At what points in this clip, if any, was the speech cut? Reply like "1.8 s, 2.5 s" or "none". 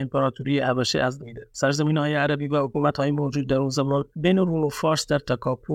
1.2 s